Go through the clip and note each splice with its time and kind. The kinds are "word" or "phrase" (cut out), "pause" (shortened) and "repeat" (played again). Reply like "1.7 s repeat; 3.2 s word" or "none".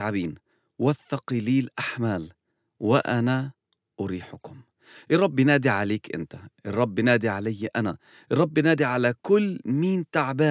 none

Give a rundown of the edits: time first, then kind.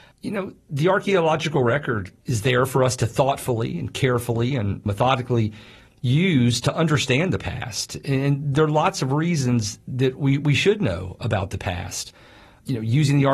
none

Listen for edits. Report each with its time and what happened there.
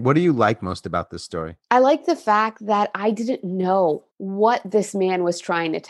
1.6 s pause; 4.1 s pause

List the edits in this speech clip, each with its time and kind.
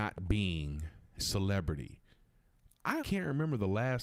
1.2 s word; 3.0 s word

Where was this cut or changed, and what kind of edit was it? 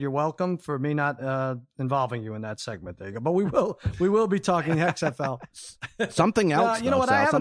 none

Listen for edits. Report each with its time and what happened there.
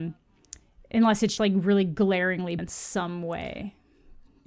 1.4 s word; 2.6 s word

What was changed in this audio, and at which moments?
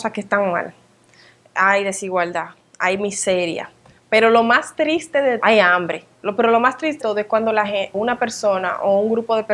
5.4 s word; 7.0 s word; 7.9 s word

